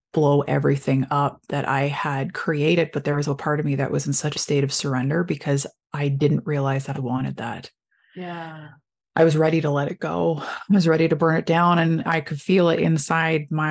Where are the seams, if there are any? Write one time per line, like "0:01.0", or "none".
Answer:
0:03.2
0:04.3
0:06.9